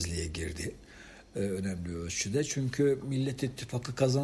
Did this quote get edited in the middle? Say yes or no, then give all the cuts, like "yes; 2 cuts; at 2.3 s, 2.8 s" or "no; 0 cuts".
no; 0 cuts